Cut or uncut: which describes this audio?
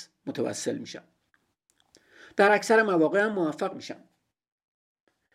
uncut